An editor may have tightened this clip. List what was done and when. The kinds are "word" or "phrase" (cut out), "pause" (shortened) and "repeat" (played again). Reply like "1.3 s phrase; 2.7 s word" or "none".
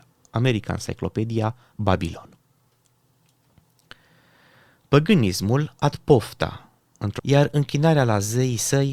1.7 s word; 5.9 s word; 7.2 s word